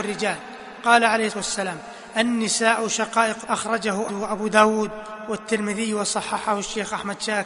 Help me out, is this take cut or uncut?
cut